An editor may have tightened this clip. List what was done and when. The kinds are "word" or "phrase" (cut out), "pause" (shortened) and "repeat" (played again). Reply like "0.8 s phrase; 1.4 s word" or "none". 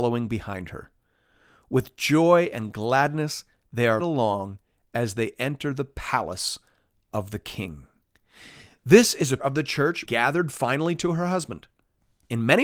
4.0 s word; 9.4 s word; 10.0 s word